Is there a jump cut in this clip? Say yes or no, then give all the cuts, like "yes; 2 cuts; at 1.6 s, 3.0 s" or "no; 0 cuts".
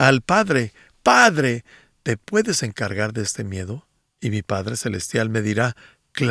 no; 0 cuts